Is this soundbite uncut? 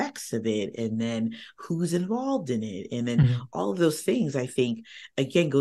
yes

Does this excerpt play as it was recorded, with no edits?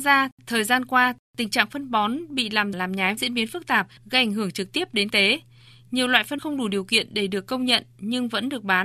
no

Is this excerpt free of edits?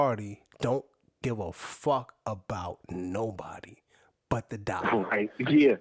yes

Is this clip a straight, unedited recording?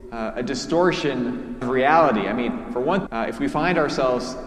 no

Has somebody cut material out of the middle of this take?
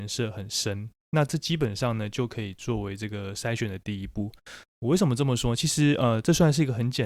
no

